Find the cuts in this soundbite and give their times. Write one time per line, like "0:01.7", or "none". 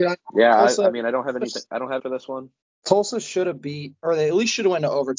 0:02.0
0:02.6